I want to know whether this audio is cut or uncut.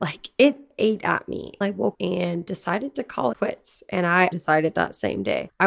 cut